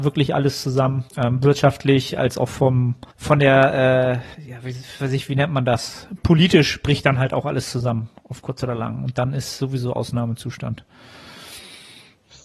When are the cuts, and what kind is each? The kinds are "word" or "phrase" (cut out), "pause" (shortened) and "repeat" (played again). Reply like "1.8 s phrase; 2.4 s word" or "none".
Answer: 1.1 s pause; 3.1 s pause; 4.3 s pause; 5.0 s word; 6.2 s word